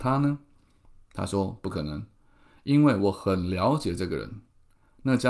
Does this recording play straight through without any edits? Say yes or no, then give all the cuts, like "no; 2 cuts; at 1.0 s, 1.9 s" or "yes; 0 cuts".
yes; 0 cuts